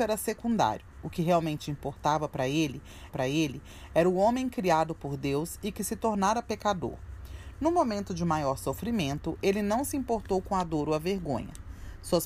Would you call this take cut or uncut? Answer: cut